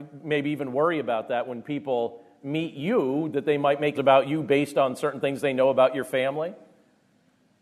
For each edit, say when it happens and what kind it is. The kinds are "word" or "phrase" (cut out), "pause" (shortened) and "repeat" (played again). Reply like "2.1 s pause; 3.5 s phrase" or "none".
3.9 s word

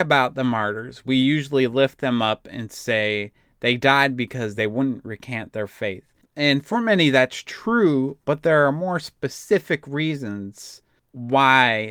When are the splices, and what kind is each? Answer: none

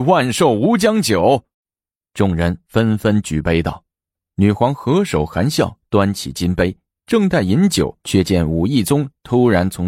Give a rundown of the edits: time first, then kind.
1.5 s pause; 3.9 s pause; 8.0 s pause

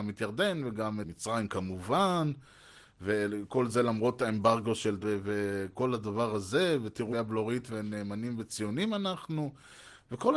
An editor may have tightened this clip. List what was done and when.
1.0 s word; 5.0 s word; 7.1 s phrase

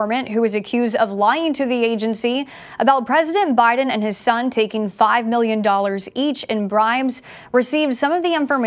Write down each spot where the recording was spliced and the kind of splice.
none

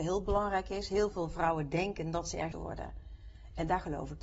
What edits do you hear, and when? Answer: 2.5 s phrase

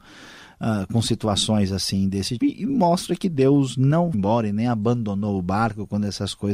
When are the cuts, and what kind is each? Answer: 2.4 s word; 4.1 s word

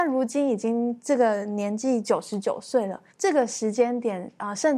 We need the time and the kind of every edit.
3.1 s pause

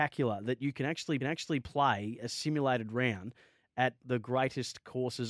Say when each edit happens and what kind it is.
1.2 s repeat; 4.0 s phrase

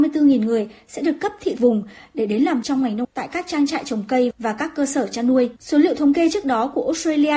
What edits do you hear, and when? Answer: 1.6 s word; 2.6 s word; 3.0 s word; 5.6 s pause

